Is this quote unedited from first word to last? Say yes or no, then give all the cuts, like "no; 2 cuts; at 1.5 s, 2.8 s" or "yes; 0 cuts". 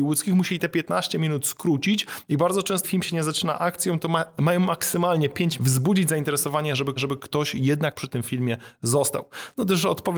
no; 3 cuts; at 2.8 s, 5.6 s, 7.0 s